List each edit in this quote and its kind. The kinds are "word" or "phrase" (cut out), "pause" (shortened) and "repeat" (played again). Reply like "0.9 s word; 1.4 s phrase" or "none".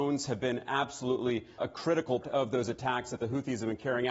1.6 s word; 2.2 s word